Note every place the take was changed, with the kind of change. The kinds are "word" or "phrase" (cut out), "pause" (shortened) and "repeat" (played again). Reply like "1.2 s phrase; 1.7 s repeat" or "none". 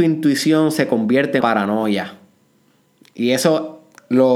1.4 s word